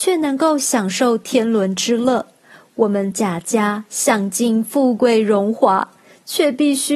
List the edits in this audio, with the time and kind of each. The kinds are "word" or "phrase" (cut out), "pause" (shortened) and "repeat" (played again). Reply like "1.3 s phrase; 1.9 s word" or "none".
none